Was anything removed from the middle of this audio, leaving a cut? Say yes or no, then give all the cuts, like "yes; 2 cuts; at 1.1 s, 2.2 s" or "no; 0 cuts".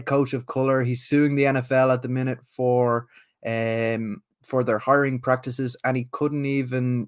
no; 0 cuts